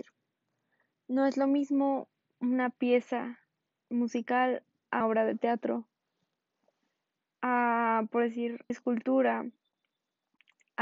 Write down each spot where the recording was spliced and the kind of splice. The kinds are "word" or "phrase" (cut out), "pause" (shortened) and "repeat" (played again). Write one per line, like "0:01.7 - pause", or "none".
0:05.0 - word
0:08.7 - word